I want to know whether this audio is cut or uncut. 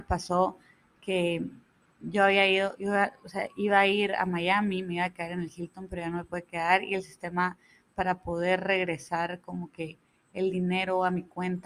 uncut